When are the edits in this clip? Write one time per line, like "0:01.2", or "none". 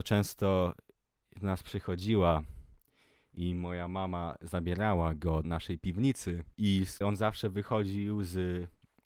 0:05.4
0:06.5
0:07.0